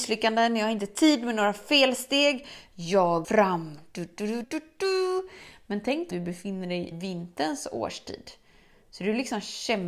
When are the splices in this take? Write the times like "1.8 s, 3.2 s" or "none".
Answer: 3.2 s, 4.4 s, 6.1 s, 6.9 s